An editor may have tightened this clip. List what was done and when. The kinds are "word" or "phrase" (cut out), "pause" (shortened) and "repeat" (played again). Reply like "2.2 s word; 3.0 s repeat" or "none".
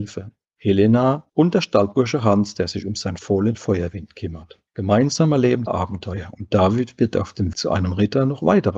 1.3 s pause; 4.7 s pause; 5.7 s phrase; 7.5 s word